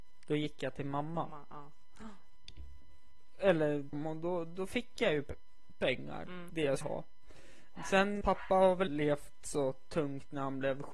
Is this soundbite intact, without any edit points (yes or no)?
no